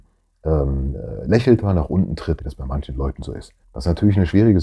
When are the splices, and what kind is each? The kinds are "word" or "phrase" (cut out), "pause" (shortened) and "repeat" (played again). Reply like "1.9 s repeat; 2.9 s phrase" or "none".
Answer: 2.4 s word; 3.6 s pause